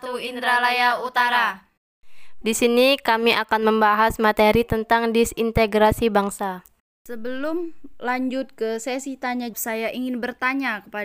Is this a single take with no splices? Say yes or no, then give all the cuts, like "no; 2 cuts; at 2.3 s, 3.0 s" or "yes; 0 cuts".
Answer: no; 2 cuts; at 2.4 s, 9.5 s